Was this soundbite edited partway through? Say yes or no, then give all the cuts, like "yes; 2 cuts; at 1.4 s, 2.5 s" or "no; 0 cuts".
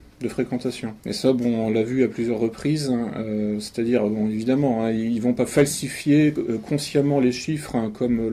yes; 1 cut; at 1.0 s